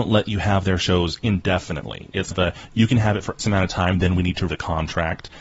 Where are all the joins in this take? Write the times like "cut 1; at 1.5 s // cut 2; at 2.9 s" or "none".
cut 1; at 2.3 s // cut 2; at 3.4 s // cut 3; at 4.5 s